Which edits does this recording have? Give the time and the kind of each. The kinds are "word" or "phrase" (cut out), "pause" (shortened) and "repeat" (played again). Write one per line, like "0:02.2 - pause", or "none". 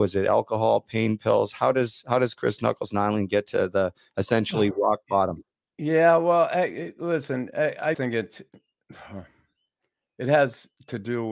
0:07.9 - word